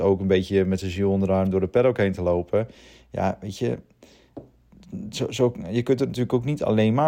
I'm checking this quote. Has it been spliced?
no; 0 cuts

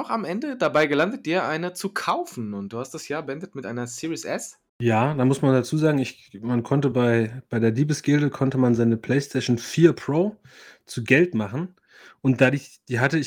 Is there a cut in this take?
no; 0 cuts

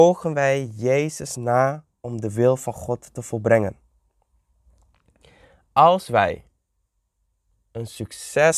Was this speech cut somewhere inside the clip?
no; 0 cuts

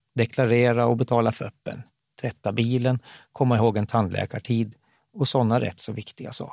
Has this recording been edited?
no; 0 cuts

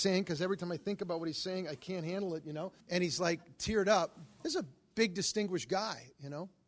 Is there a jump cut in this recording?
yes; 1 cut; at 2.8 s

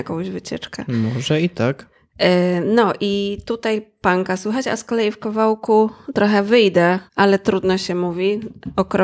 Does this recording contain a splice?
yes; 1 cut; at 7.1 s

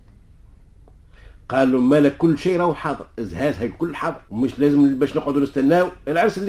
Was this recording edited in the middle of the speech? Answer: yes; 1 cut; at 4.3 s

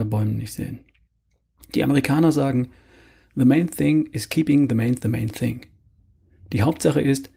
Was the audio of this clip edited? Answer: yes; 1 cut; at 5.0 s

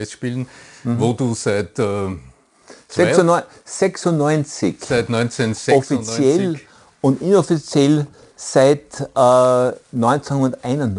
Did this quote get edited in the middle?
no; 0 cuts

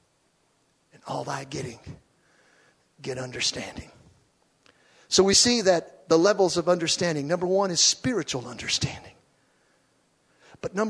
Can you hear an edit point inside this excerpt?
no; 0 cuts

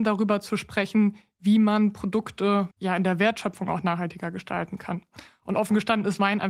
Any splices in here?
yes; 1 cut; at 2.7 s

